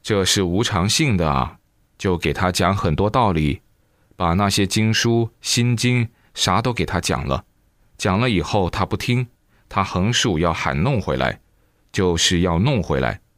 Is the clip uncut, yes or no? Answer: yes